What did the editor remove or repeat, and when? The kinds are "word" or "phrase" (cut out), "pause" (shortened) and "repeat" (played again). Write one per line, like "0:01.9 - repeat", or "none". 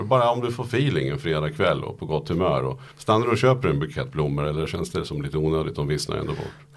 0:02.9 - pause